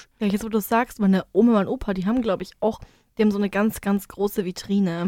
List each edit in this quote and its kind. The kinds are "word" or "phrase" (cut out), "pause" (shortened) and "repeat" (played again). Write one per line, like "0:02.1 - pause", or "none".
none